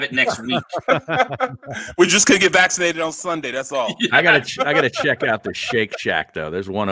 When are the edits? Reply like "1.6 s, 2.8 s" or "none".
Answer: none